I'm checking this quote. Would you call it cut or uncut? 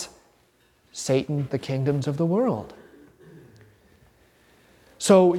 cut